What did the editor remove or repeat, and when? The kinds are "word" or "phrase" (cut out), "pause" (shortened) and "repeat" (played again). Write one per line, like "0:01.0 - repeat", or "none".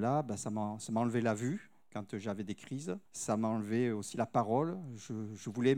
0:03.1 - pause